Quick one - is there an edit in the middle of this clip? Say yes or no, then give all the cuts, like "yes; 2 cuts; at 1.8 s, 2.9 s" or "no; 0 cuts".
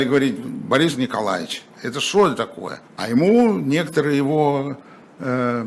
yes; 1 cut; at 2.8 s